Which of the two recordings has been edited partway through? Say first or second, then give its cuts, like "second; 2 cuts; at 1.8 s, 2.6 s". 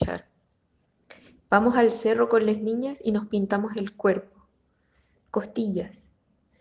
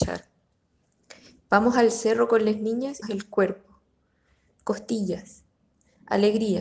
second; 1 cut; at 3.0 s